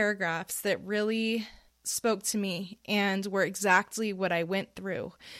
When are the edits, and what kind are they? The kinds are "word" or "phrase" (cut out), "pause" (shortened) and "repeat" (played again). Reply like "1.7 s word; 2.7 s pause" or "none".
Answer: 1.7 s pause